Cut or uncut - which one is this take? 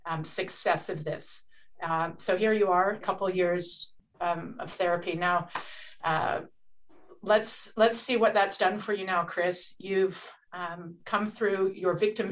cut